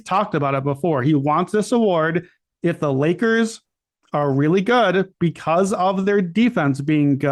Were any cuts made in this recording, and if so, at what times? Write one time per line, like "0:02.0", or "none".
none